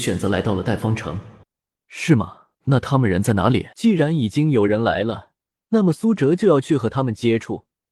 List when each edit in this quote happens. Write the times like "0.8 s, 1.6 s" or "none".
1.4 s, 2.5 s, 3.7 s, 5.5 s